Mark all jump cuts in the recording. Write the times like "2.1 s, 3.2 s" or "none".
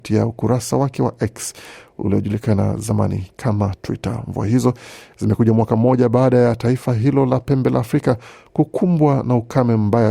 none